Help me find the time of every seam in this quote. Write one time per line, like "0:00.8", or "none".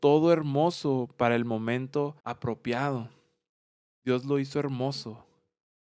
0:02.2